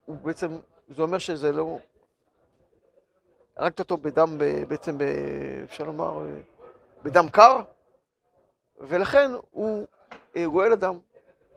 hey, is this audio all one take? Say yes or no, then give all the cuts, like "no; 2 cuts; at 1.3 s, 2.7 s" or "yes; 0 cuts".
yes; 0 cuts